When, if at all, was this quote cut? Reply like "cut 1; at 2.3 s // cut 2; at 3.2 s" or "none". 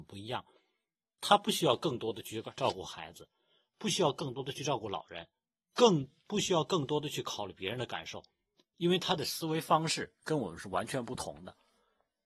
none